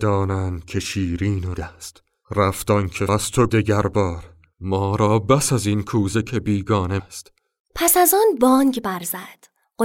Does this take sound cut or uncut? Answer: cut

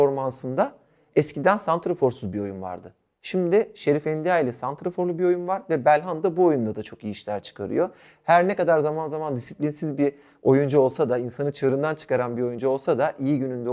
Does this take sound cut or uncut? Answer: uncut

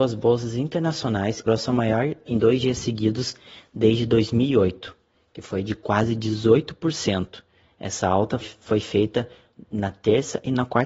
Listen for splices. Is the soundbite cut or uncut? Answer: cut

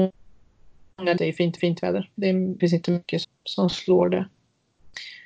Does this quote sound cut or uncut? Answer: cut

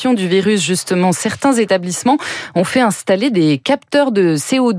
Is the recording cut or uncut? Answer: uncut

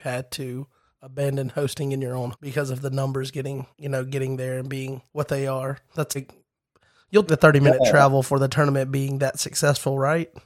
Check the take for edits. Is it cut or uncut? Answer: cut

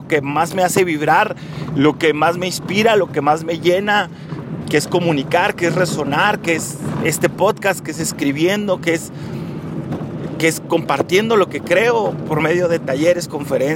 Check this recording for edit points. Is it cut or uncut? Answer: uncut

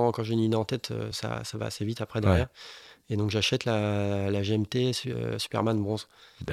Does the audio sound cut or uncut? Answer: uncut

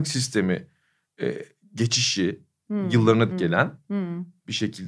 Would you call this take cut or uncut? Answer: cut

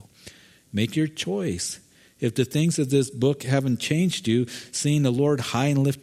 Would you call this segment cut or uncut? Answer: uncut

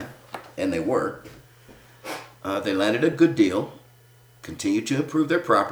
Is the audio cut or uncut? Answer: uncut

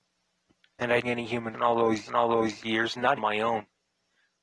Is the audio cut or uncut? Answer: cut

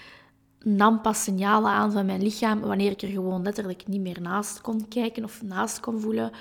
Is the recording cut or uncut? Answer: uncut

